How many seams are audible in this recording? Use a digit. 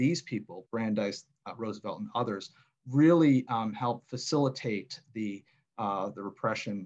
0